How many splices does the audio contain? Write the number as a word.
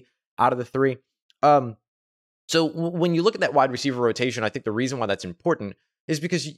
zero